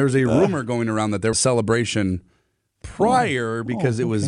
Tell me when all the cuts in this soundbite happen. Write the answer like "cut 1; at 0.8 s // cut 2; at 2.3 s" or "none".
cut 1; at 1.3 s // cut 2; at 2.8 s

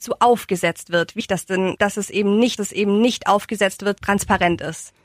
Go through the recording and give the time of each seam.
cut 1; at 1.2 s // cut 2; at 2.6 s // cut 3; at 4.0 s

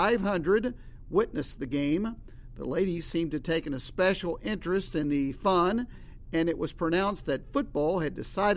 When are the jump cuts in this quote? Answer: none

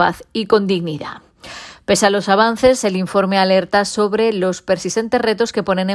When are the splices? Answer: none

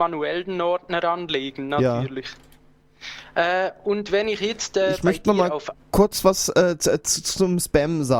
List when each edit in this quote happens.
none

